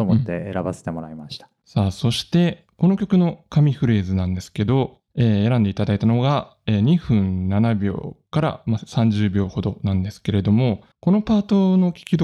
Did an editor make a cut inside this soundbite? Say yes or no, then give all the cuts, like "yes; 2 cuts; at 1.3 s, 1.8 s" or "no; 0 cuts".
yes; 3 cuts; at 1.6 s, 5.1 s, 10.9 s